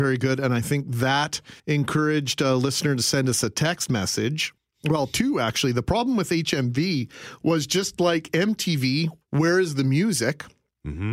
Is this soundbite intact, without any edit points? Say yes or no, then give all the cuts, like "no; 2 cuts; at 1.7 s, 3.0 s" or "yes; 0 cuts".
no; 3 cuts; at 1.6 s, 4.6 s, 9.2 s